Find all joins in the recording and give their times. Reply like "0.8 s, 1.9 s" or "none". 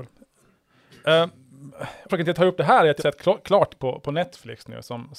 2.1 s, 3.0 s, 3.8 s